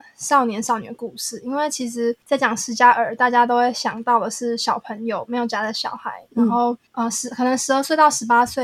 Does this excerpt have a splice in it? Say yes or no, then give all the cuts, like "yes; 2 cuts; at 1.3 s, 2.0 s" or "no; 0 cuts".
yes; 2 cuts; at 2.2 s, 6.9 s